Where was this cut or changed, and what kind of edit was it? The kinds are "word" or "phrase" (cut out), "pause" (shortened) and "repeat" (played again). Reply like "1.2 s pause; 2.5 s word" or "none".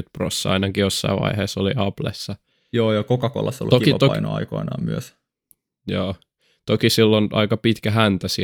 none